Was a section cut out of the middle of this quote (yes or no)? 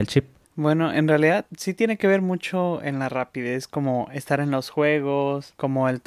no